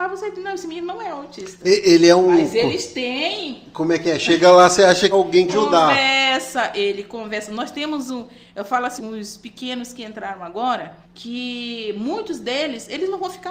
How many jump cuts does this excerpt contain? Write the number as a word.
four